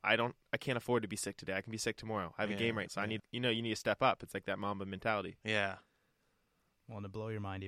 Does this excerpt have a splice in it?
yes; 2 cuts; at 2.9 s, 3.2 s

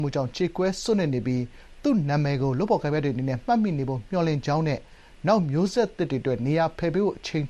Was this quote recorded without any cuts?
yes; 0 cuts

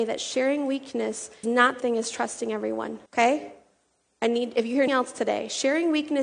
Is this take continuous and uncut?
no; 4 cuts; at 1.4 s, 1.8 s, 3.1 s, 4.9 s

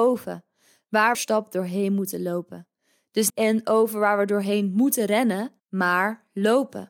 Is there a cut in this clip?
yes; 3 cuts; at 1.1 s, 3.3 s, 5.6 s

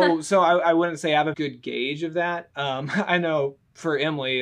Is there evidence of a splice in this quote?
yes; 1 cut; at 1.3 s

